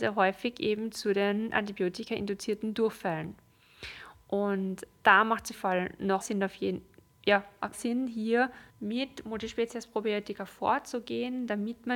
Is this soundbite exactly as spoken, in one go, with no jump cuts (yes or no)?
no